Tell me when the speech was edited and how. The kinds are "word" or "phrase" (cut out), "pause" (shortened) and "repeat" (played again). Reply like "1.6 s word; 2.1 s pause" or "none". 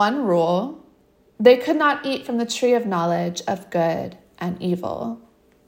none